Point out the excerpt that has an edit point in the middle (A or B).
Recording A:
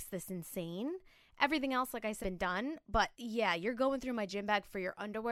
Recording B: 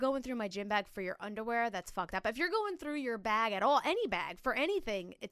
A